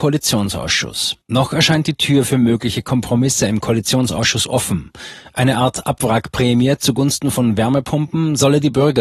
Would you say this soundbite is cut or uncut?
cut